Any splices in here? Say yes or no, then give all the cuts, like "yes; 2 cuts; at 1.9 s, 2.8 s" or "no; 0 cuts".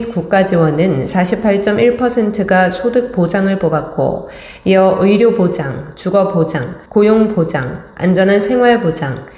yes; 1 cut; at 6.9 s